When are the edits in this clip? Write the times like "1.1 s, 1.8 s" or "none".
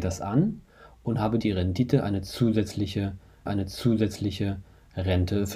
1.4 s, 3.5 s